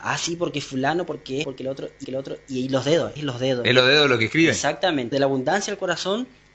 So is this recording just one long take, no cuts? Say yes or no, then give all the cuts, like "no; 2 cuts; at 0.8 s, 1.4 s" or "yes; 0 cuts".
no; 4 cuts; at 1.4 s, 2.0 s, 3.2 s, 5.1 s